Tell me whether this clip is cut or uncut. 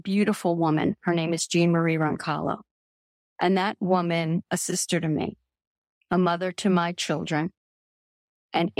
cut